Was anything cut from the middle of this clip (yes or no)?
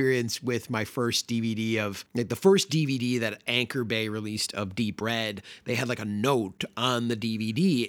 no